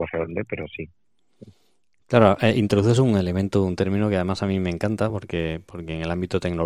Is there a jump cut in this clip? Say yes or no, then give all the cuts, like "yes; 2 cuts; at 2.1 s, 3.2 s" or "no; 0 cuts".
no; 0 cuts